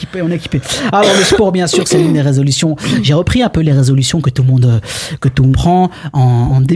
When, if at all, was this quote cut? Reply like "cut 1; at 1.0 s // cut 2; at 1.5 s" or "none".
cut 1; at 5.5 s

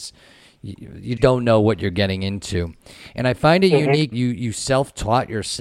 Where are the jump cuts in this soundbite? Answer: cut 1; at 1.2 s // cut 2; at 4.1 s

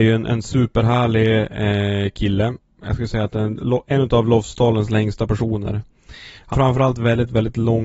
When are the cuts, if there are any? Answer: cut 1; at 6.5 s

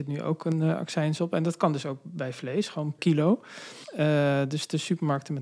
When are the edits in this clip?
cut 1; at 3.0 s

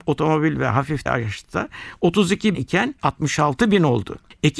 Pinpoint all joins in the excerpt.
cut 1; at 1.1 s // cut 2; at 2.5 s // cut 3; at 3.0 s

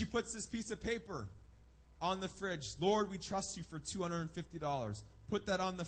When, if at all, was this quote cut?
none

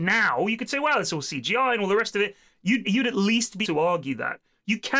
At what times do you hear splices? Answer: cut 1; at 2.8 s // cut 2; at 3.6 s

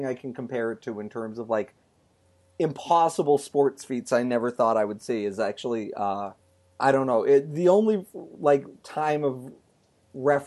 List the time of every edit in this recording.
cut 1; at 6.4 s

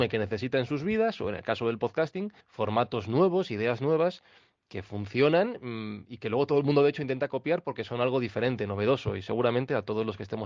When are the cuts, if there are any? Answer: cut 1; at 2.4 s

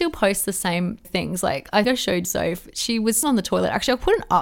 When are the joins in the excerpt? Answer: cut 1; at 1.0 s // cut 2; at 1.8 s // cut 3; at 2.2 s // cut 4; at 3.2 s

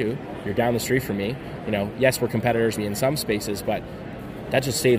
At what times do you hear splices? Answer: cut 1; at 2.8 s

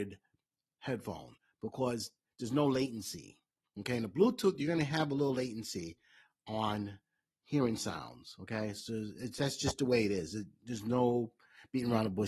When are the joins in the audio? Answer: none

